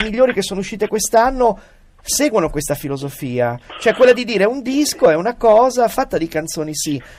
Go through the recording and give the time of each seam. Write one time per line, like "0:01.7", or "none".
none